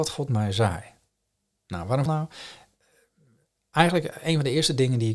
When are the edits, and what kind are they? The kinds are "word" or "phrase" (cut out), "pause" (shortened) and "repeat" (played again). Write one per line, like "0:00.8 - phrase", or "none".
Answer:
0:02.1 - phrase